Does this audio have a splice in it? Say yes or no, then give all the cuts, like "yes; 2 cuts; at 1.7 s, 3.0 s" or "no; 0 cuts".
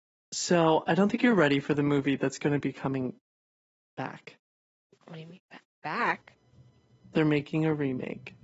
no; 0 cuts